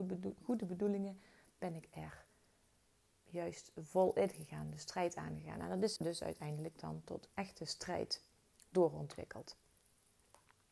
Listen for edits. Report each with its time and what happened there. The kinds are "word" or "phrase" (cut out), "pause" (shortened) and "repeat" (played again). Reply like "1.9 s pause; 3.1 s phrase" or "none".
3.1 s word; 6.0 s word; 7.3 s word